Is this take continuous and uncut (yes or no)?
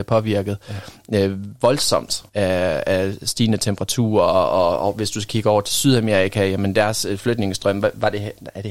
no